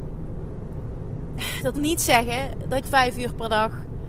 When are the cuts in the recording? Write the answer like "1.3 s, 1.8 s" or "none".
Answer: 1.7 s, 2.8 s